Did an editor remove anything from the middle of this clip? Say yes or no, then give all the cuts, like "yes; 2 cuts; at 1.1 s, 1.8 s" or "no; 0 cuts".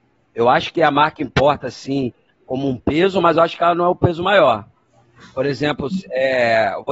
no; 0 cuts